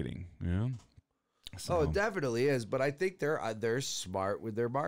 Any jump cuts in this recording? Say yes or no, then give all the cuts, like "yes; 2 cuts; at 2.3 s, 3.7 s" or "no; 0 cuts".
no; 0 cuts